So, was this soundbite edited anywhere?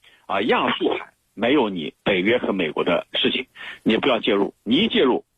yes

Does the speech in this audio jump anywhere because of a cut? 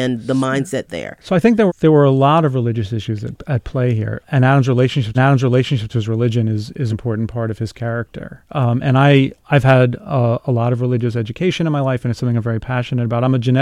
yes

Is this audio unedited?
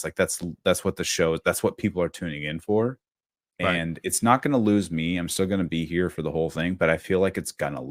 yes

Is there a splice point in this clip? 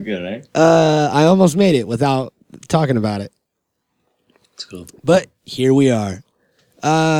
no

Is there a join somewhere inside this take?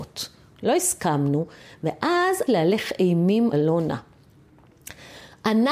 yes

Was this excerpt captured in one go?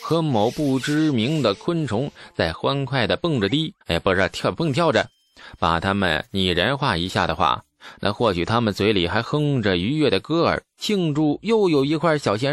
no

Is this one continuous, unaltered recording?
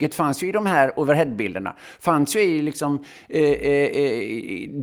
yes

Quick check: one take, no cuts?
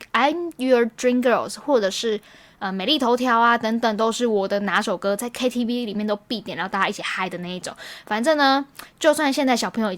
yes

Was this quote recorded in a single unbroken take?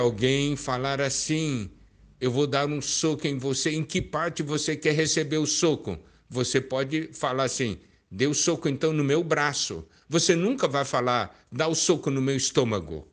yes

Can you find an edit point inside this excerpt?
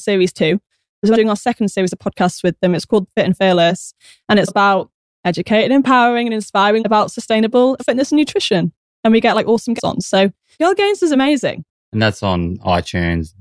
yes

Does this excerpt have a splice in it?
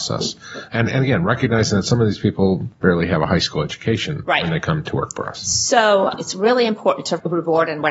no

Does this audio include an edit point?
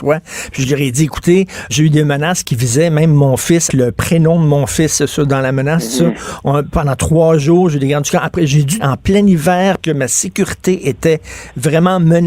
yes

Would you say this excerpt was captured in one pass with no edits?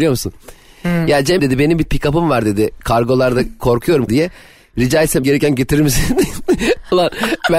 no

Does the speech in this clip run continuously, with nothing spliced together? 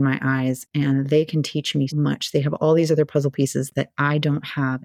no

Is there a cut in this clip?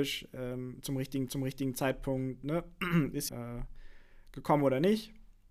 yes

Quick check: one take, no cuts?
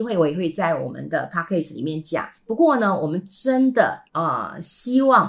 no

